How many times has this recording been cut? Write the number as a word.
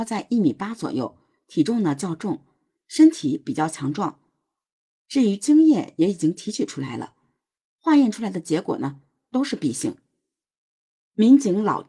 zero